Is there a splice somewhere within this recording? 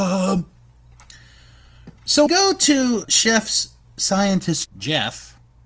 yes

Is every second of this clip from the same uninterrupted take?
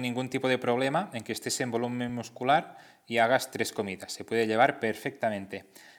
yes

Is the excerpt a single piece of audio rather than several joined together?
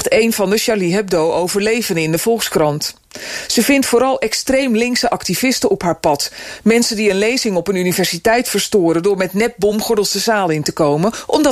yes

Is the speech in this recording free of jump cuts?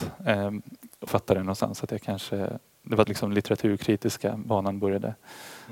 no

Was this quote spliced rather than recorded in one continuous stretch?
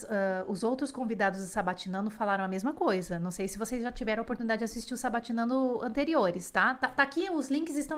no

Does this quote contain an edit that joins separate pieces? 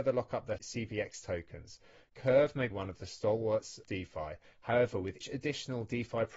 yes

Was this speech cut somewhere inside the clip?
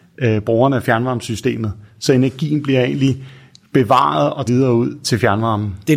yes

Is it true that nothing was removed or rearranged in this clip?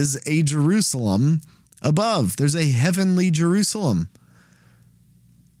yes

